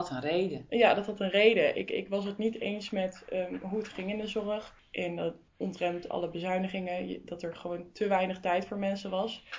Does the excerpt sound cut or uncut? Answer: uncut